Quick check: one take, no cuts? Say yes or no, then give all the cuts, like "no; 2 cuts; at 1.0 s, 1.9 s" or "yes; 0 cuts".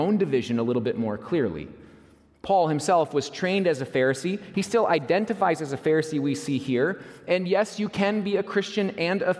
yes; 0 cuts